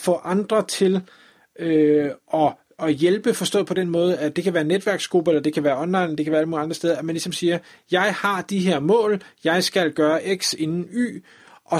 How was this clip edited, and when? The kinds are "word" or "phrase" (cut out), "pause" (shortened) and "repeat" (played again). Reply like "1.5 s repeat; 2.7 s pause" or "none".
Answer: none